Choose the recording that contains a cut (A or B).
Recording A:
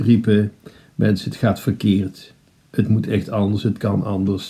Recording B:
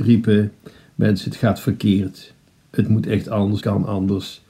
B